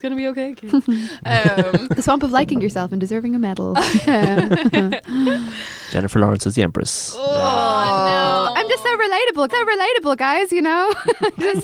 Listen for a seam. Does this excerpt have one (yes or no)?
yes